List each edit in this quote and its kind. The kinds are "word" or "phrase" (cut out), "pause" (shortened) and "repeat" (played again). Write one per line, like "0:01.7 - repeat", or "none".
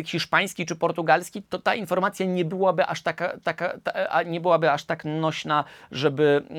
0:01.4 - word
0:03.4 - repeat